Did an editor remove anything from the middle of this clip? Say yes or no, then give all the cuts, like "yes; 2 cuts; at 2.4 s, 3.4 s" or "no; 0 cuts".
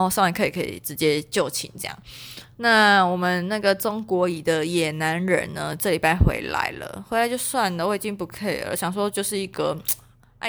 no; 0 cuts